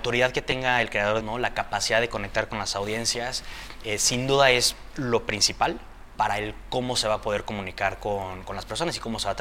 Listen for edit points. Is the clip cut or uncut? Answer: cut